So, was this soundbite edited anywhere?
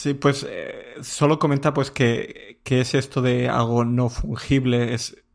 no; 0 cuts

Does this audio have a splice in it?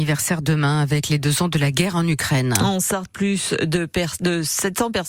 no; 0 cuts

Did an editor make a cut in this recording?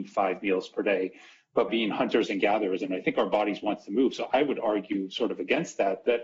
yes; 1 cut; at 1.7 s

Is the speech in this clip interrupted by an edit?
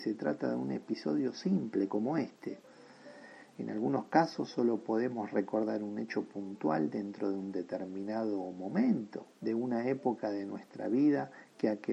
yes; 1 cut; at 9.3 s

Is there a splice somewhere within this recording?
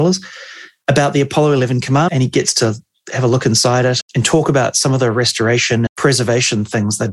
yes; 3 cuts; at 2.1 s, 4.0 s, 5.9 s

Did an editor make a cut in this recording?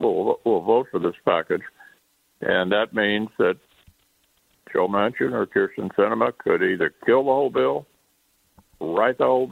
no; 0 cuts

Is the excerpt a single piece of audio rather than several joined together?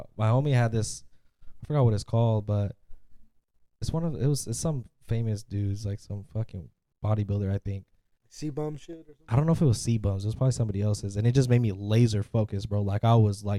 yes; 0 cuts

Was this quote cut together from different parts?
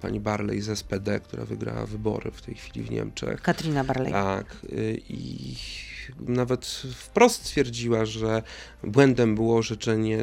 no; 0 cuts

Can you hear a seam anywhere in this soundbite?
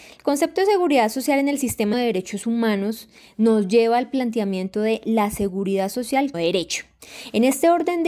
yes; 2 cuts; at 1.9 s, 6.3 s

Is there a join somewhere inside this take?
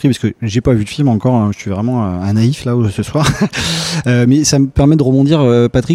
no; 0 cuts

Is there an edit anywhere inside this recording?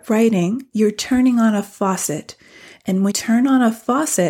yes; 1 cut; at 3.1 s

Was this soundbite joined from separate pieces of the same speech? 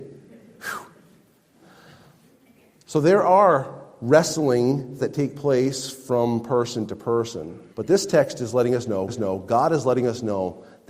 yes; 3 cuts; at 5.0 s, 7.7 s, 9.1 s

